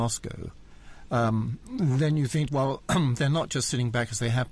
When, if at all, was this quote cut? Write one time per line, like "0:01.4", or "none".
0:02.5